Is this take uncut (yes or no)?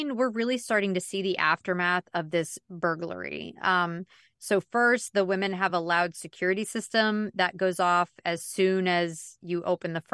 yes